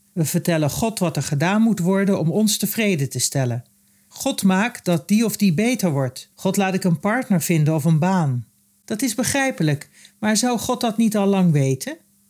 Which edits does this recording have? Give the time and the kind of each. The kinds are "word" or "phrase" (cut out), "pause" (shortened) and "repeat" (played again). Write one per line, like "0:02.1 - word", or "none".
0:06.3 - pause